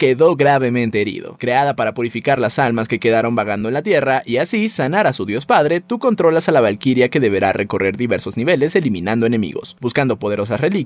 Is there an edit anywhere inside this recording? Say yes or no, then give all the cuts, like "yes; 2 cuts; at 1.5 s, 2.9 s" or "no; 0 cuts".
no; 0 cuts